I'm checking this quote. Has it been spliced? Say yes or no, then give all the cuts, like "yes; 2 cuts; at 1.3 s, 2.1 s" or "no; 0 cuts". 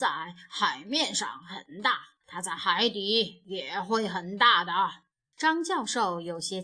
yes; 2 cuts; at 2.2 s, 5.2 s